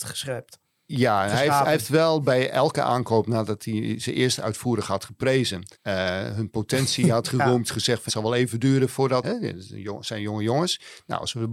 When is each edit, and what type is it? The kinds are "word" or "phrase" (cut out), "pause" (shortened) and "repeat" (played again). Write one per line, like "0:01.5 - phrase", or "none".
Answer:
0:05.7 - pause
0:08.1 - phrase
0:09.2 - word